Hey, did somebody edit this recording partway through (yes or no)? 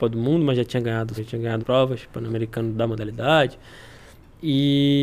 yes